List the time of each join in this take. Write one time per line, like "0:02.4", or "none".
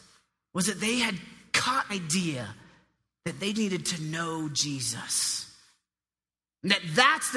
0:01.9
0:03.5